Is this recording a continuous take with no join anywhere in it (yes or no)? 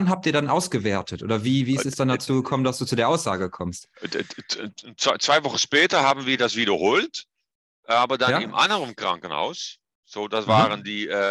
yes